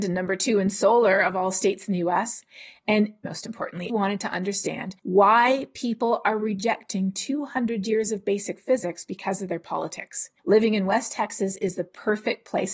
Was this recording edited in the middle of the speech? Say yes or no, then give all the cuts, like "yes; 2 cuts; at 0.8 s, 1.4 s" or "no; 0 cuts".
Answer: yes; 4 cuts; at 3.2 s, 3.9 s, 5.0 s, 10.4 s